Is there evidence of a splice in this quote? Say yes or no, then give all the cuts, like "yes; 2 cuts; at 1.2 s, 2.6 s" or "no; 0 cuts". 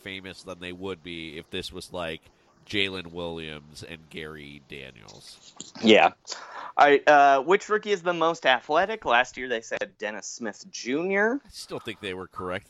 no; 0 cuts